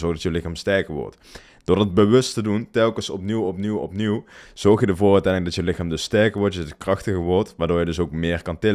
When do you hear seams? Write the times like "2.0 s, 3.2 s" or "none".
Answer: none